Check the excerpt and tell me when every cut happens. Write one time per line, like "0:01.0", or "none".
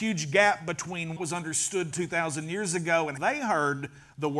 0:01.2
0:03.2